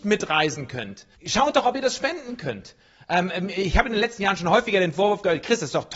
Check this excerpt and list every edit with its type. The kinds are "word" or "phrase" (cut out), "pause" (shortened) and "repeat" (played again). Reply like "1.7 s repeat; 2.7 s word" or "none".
1.1 s pause